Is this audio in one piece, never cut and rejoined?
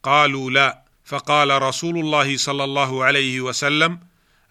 no; 1 cut; at 0.9 s

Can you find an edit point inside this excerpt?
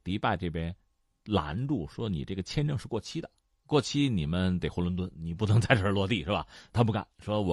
no; 0 cuts

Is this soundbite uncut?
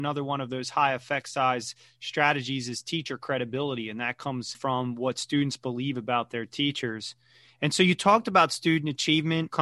yes; 0 cuts

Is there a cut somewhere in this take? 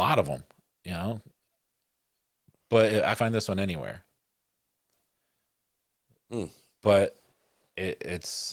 yes; 1 cut; at 3.2 s

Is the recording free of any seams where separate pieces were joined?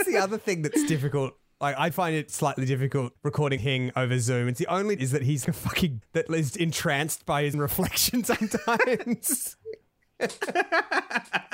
no; 9 cuts; at 1.9 s, 2.3 s, 3.2 s, 3.6 s, 5.0 s, 5.4 s, 6.0 s, 6.5 s, 7.5 s

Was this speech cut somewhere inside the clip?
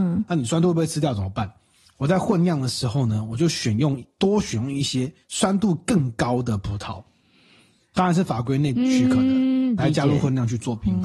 yes; 1 cut; at 5.2 s

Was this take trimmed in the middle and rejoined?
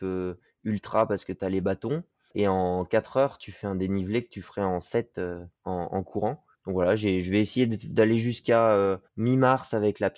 yes; 3 cuts; at 5.5 s, 6.5 s, 9.1 s

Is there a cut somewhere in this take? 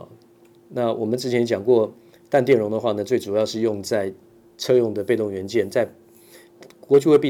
no; 0 cuts

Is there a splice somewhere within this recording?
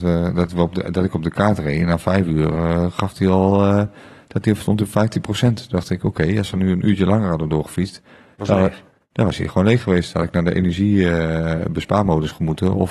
no; 0 cuts

